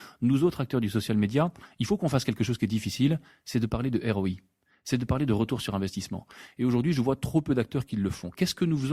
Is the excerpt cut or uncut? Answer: uncut